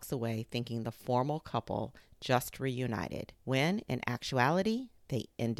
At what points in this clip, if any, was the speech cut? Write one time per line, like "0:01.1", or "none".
0:03.4